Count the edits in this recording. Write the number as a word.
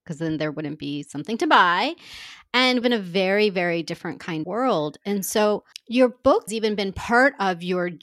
four